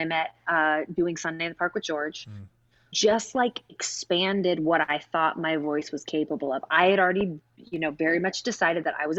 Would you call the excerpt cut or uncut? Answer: cut